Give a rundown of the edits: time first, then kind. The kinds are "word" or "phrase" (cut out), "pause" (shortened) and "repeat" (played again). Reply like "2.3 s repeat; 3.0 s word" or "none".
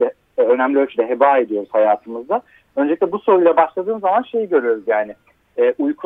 none